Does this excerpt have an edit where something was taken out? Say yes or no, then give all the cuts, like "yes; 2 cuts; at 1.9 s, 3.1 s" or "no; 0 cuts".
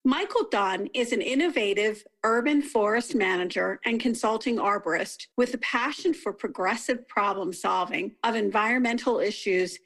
yes; 1 cut; at 5.3 s